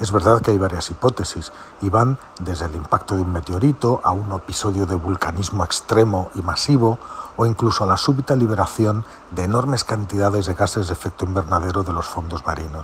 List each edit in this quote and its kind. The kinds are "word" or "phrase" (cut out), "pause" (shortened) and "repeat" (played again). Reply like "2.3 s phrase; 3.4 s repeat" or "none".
none